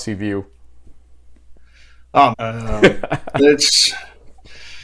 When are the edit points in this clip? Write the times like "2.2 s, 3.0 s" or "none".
2.3 s, 3.4 s